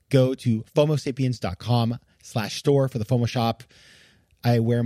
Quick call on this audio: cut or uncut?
uncut